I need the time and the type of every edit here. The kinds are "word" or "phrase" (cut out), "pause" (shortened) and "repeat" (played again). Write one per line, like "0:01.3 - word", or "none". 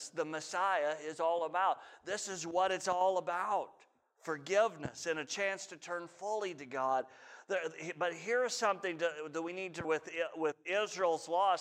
0:09.8 - word

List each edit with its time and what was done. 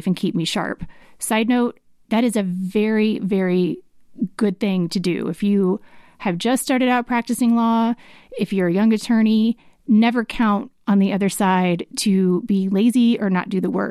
none

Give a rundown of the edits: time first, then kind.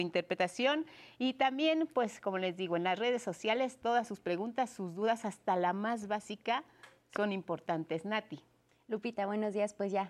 none

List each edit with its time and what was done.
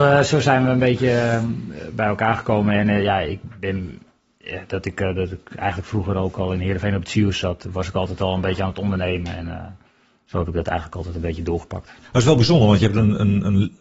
none

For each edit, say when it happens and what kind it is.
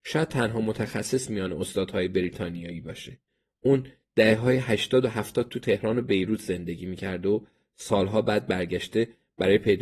none

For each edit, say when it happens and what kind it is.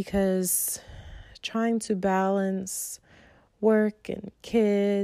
none

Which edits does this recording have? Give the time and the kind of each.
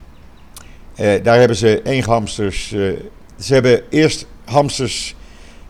0:02.0 - word

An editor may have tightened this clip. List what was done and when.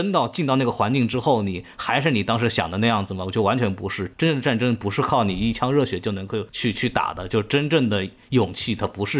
0:06.5 - pause

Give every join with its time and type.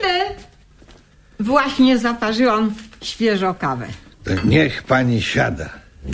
none

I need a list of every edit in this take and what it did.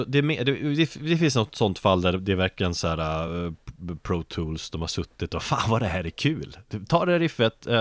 none

